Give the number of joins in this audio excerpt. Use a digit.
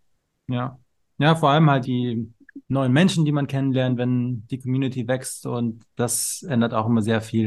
2